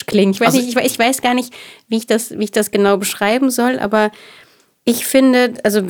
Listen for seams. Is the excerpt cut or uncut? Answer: uncut